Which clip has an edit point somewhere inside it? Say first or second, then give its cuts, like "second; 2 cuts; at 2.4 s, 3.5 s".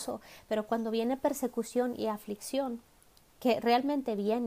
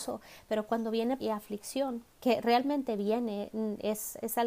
second; 2 cuts; at 1.2 s, 2.1 s